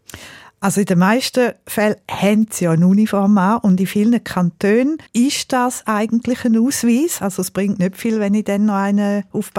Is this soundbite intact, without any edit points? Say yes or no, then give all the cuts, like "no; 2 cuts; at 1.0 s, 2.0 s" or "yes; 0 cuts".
no; 1 cut; at 5.1 s